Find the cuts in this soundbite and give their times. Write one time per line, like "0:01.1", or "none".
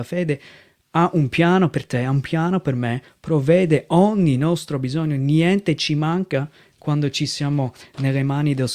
none